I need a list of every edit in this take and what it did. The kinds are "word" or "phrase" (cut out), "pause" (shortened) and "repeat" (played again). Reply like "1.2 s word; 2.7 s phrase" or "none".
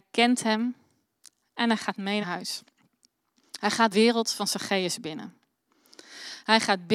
2.2 s phrase; 3.9 s word